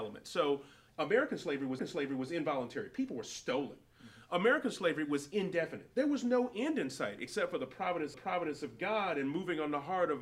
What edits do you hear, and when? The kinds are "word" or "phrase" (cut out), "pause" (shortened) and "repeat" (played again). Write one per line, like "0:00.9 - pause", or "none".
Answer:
0:01.8 - repeat
0:08.1 - repeat